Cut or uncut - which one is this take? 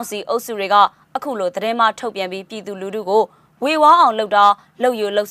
uncut